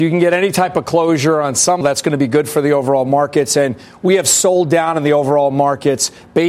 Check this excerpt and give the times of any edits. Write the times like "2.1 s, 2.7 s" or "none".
1.8 s